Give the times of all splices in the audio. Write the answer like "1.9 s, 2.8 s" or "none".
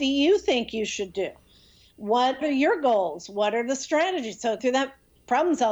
2.4 s, 4.6 s